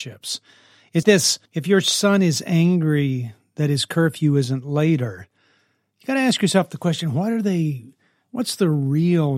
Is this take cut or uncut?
cut